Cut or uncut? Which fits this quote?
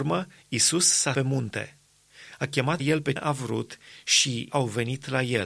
cut